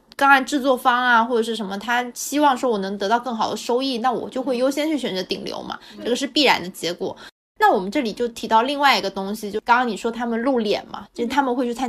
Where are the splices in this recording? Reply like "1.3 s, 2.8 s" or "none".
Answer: none